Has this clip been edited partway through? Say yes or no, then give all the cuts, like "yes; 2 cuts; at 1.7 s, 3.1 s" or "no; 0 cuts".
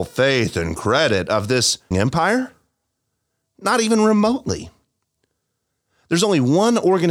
yes; 1 cut; at 1.9 s